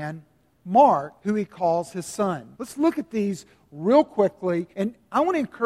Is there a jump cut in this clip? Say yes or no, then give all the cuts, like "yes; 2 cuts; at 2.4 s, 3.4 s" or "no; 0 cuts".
yes; 3 cuts; at 1.2 s, 2.5 s, 4.7 s